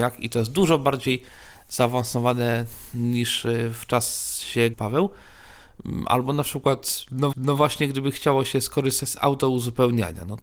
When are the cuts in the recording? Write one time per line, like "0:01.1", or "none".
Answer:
0:04.7
0:07.3

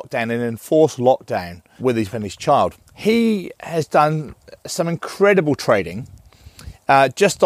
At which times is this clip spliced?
0:01.8
0:02.1
0:02.9
0:04.6

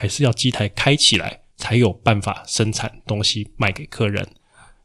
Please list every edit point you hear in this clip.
0:01.5

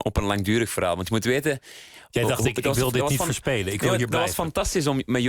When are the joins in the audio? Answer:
none

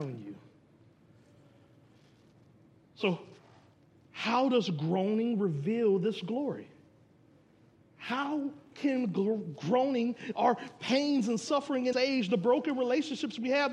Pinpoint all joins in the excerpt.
0:11.9

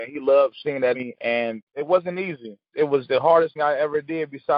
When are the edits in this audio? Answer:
0:00.9
0:01.7
0:03.6

